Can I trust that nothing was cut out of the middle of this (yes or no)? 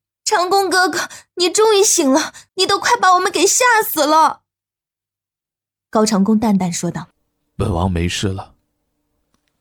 no